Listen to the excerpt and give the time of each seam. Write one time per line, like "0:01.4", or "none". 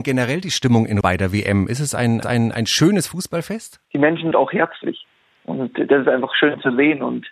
0:01.0
0:02.2
0:03.8
0:04.3